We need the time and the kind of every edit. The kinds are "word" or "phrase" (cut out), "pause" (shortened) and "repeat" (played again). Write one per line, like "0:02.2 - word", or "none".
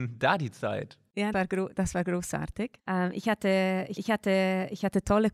0:01.3 - word
0:02.8 - pause
0:04.0 - repeat